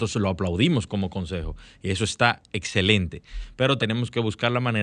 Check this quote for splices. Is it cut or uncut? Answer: cut